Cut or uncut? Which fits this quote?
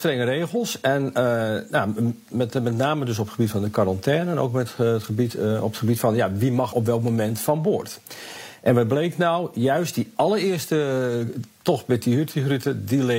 cut